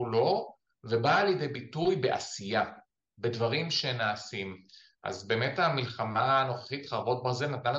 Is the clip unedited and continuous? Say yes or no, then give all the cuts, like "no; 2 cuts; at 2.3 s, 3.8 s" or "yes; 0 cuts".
yes; 0 cuts